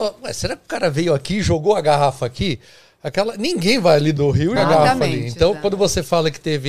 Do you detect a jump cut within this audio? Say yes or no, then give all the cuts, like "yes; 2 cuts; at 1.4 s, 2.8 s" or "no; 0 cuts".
yes; 2 cuts; at 4.2 s, 4.6 s